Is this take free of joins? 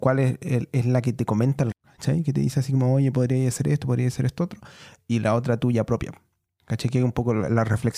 no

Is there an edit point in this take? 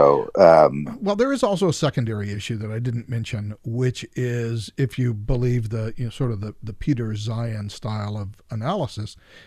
no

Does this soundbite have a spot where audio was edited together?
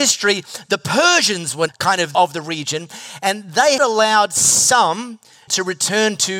yes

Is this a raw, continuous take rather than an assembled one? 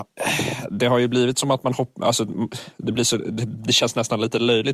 yes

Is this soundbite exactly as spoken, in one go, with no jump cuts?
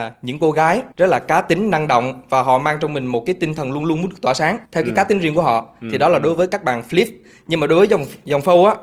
no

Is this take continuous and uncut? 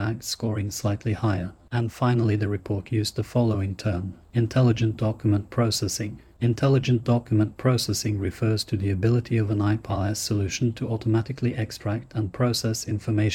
yes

